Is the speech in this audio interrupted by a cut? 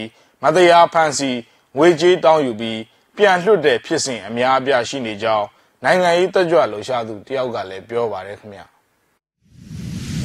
no; 0 cuts

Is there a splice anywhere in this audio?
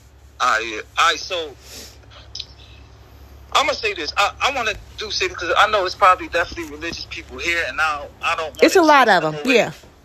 no; 0 cuts

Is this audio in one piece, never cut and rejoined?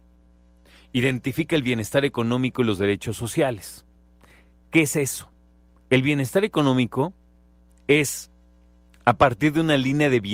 yes; 0 cuts

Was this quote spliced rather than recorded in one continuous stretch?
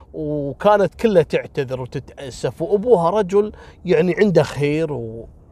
no; 0 cuts

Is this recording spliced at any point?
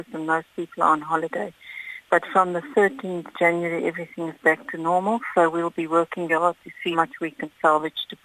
yes; 3 cuts; at 3.3 s, 6.3 s, 6.9 s

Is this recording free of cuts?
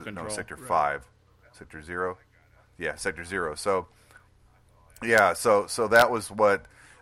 yes; 0 cuts

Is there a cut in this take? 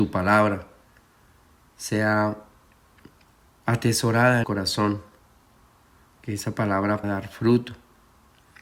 yes; 2 cuts; at 4.4 s, 7.0 s

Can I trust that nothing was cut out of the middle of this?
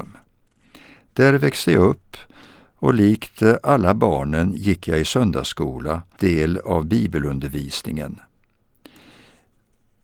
no; 1 cut; at 6.2 s

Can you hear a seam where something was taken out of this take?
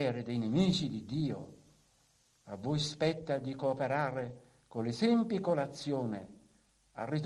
no; 0 cuts

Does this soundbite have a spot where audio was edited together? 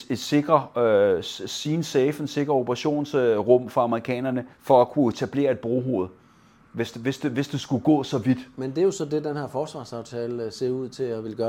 yes; 1 cut; at 4.5 s

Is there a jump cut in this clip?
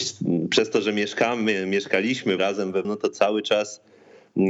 yes; 2 cuts; at 2.4 s, 2.8 s

